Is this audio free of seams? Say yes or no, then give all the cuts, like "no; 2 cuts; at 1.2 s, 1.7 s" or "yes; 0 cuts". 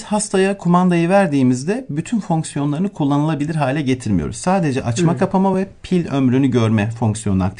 yes; 0 cuts